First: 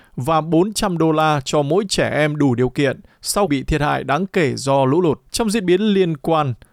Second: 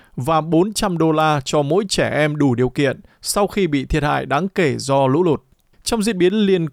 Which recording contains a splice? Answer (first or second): first